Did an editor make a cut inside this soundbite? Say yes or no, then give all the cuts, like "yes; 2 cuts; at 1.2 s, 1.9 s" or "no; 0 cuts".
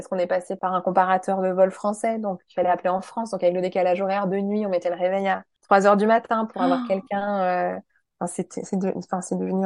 no; 0 cuts